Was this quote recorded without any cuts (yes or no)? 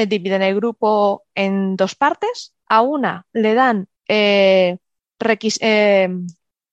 no